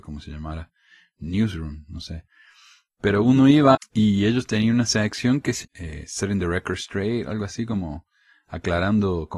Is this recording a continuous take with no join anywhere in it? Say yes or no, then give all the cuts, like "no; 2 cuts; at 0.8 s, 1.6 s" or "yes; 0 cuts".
no; 2 cuts; at 3.7 s, 5.6 s